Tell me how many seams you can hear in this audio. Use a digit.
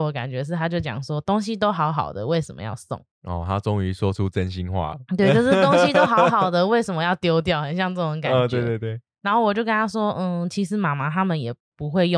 1